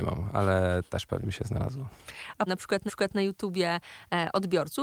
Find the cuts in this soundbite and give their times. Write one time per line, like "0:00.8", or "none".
0:01.2
0:02.5
0:02.9